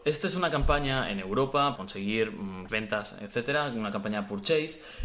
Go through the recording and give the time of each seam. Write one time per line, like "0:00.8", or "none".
0:01.8
0:02.7